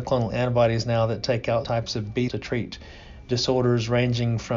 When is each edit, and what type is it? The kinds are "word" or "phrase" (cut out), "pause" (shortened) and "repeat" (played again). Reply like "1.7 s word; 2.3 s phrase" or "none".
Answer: 1.6 s word; 2.3 s word